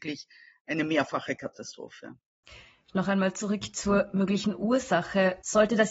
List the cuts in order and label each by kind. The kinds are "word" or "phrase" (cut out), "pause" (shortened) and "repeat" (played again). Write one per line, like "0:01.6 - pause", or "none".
none